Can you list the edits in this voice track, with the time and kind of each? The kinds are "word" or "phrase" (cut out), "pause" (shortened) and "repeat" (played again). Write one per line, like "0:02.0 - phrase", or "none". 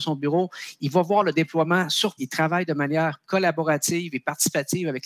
0:02.2 - word